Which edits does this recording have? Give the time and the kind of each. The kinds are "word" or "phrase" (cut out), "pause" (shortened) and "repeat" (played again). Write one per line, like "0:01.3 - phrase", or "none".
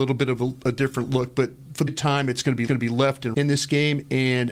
0:01.9 - word
0:02.7 - repeat
0:03.3 - word